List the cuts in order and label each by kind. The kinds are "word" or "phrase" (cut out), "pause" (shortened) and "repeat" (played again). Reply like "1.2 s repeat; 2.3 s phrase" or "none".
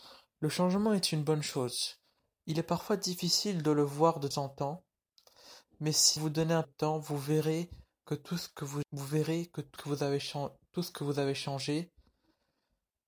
4.3 s word; 6.2 s word; 6.6 s word; 8.8 s word; 9.8 s word